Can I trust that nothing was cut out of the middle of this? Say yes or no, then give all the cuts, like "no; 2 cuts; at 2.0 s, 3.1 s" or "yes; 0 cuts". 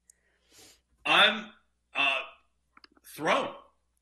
yes; 0 cuts